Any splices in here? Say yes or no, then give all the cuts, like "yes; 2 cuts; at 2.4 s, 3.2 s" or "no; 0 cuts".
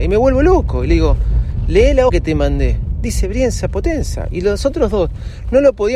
yes; 1 cut; at 2.1 s